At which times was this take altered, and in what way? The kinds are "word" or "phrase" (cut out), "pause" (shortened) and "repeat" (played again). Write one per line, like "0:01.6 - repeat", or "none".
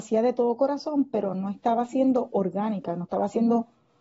none